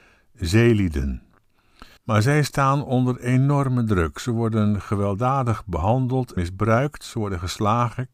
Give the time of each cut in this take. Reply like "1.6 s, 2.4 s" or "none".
2.0 s, 6.4 s